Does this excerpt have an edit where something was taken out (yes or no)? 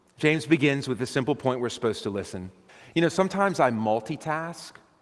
yes